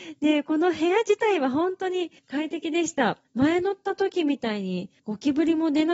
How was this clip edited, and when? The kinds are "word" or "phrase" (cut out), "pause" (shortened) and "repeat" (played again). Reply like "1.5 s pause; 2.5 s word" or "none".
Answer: 2.2 s pause; 3.2 s pause; 5.0 s pause